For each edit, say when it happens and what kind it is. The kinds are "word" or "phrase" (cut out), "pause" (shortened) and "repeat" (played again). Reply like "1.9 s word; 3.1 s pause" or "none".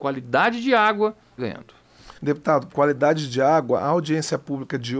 1.4 s phrase; 2.2 s pause; 2.7 s phrase